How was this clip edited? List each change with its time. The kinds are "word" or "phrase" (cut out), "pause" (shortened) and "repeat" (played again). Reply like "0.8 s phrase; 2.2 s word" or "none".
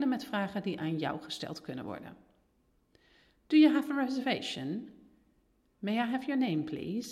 none